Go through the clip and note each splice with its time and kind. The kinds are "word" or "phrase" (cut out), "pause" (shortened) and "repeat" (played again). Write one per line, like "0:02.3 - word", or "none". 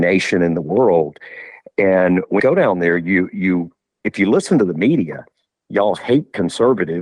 0:02.4 - word